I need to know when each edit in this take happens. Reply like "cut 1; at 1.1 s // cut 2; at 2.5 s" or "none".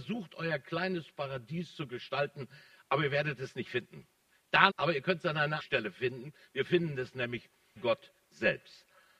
cut 1; at 4.7 s // cut 2; at 5.6 s // cut 3; at 7.8 s